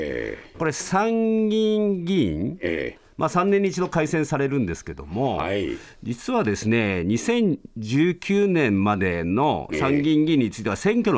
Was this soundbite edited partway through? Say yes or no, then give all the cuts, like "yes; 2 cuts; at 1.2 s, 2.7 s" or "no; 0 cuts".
no; 0 cuts